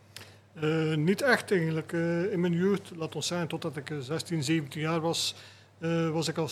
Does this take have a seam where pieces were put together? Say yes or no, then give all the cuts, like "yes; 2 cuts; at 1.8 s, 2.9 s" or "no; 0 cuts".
no; 0 cuts